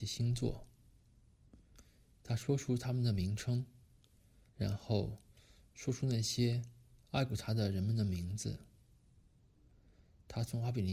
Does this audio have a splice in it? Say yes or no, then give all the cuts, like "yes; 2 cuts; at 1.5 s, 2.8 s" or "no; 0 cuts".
yes; 1 cut; at 4.5 s